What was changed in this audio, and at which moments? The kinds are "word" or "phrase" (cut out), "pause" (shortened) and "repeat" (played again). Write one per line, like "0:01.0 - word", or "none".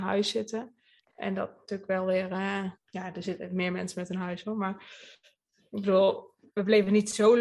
0:02.8 - pause